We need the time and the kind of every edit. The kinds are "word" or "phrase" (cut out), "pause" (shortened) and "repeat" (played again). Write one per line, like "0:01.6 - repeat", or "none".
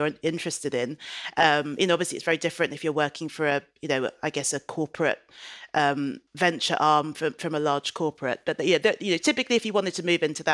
0:06.3 - pause

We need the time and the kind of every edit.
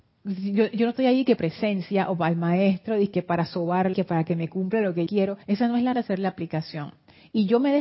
0:01.4 - phrase
0:03.9 - word
0:05.1 - word
0:05.4 - pause
0:05.9 - word

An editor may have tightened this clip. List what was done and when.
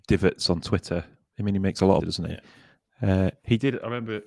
0:02.0 - phrase

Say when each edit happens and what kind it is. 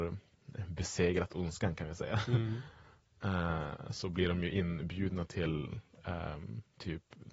none

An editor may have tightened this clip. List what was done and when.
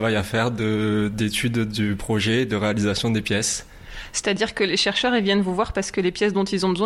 none

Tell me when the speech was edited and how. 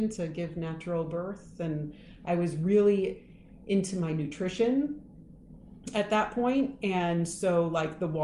none

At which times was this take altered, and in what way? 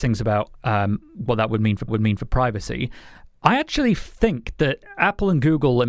0:01.9 - repeat

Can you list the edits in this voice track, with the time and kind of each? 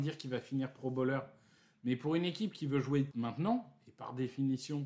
0:03.1 - word

